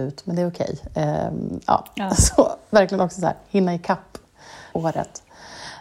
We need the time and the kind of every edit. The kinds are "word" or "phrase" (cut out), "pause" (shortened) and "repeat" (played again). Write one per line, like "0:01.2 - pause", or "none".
0:04.7 - word